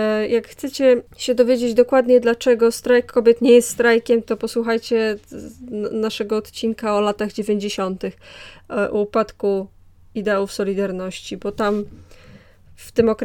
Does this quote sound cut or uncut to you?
uncut